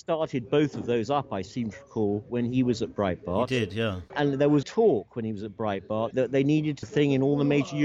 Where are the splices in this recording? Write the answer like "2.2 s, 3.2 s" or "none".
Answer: 4.6 s, 6.8 s